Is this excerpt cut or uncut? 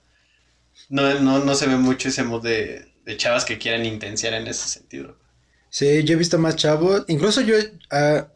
uncut